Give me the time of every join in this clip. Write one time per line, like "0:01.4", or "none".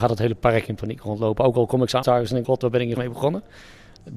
0:02.0
0:02.4
0:03.0